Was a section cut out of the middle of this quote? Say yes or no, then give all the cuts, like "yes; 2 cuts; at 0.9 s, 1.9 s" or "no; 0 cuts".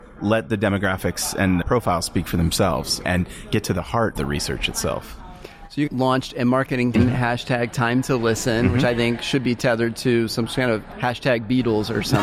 yes; 6 cuts; at 1.6 s, 3.0 s, 4.1 s, 5.9 s, 6.9 s, 10.9 s